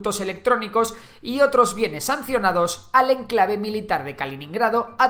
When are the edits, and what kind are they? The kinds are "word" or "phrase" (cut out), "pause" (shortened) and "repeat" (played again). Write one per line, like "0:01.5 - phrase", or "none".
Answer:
none